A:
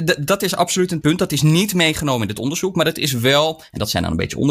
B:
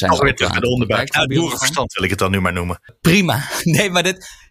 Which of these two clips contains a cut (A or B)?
A